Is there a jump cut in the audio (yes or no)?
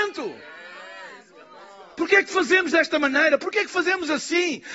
no